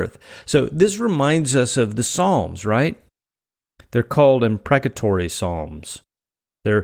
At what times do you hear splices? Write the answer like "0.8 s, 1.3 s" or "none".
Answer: none